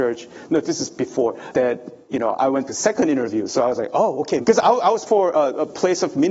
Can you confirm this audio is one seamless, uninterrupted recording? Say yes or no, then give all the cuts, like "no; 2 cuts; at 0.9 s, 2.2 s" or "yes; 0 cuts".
no; 4 cuts; at 1.5 s, 2.7 s, 4.4 s, 5.1 s